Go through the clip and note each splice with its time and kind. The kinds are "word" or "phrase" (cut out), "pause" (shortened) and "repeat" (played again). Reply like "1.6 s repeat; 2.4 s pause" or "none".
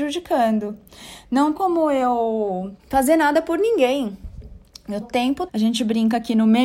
1.6 s word; 2.8 s pause; 5.0 s word; 5.5 s word